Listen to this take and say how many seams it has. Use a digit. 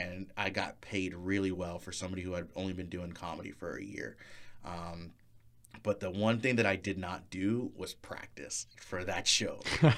0